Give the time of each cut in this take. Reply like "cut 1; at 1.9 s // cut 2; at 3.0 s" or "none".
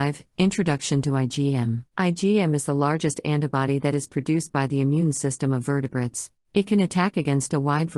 cut 1; at 1.9 s // cut 2; at 6.4 s